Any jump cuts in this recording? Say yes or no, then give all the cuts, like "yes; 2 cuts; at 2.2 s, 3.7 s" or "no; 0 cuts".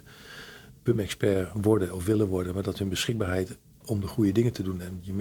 no; 0 cuts